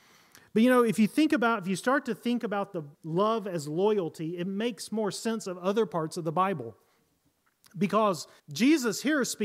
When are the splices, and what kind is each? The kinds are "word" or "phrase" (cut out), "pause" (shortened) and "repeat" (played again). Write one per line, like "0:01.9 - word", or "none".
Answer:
0:02.9 - pause
0:08.4 - pause